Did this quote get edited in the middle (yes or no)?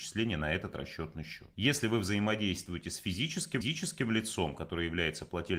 yes